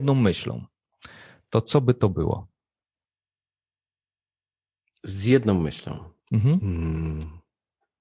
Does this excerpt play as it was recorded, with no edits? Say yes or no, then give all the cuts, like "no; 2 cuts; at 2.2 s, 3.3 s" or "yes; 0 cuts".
yes; 0 cuts